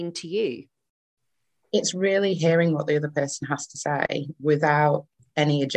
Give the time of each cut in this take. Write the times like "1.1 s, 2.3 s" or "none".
none

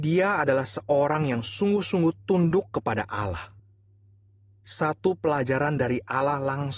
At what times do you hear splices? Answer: none

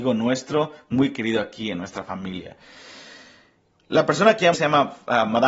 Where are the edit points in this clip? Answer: 4.5 s

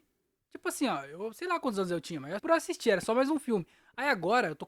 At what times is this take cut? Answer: 2.4 s

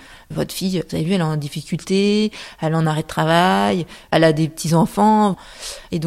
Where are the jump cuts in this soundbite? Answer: none

